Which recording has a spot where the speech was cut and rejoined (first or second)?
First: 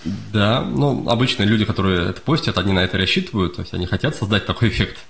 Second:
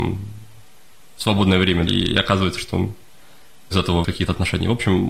second